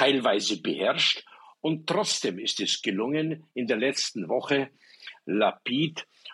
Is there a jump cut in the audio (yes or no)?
no